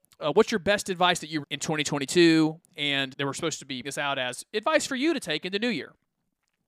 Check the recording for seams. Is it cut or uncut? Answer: cut